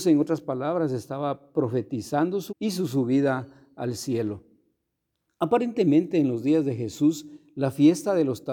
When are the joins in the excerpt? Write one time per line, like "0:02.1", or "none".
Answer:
0:02.5